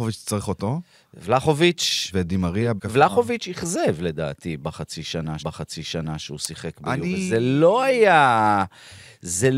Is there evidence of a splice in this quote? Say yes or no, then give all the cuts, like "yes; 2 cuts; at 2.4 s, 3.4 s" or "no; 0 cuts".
yes; 2 cuts; at 2.8 s, 5.4 s